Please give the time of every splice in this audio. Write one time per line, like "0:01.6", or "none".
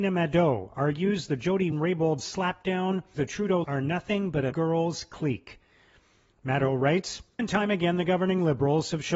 0:01.7
0:03.1
0:03.6
0:04.5
0:07.4